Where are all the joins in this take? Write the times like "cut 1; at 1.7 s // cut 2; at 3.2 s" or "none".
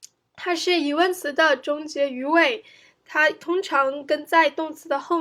none

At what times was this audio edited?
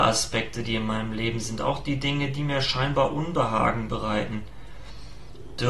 none

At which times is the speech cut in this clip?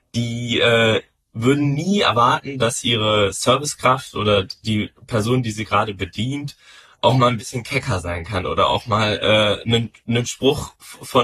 none

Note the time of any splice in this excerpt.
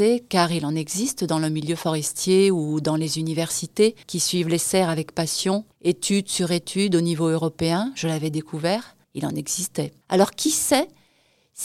cut 1; at 4.0 s // cut 2; at 5.7 s // cut 3; at 9.0 s // cut 4; at 10.0 s

